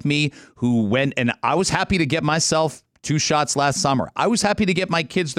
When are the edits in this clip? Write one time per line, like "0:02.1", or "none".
none